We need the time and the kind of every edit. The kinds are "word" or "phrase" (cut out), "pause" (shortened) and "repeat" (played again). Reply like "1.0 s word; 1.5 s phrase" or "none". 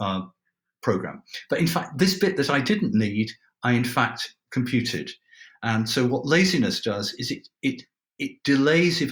none